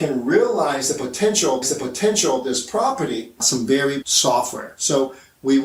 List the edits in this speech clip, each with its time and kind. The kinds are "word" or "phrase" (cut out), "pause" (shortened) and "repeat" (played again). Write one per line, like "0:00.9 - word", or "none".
0:01.6 - repeat
0:03.4 - phrase
0:04.0 - word